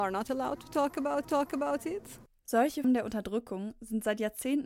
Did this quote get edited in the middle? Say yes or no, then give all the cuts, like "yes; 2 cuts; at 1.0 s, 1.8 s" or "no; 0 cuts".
yes; 2 cuts; at 1.2 s, 2.8 s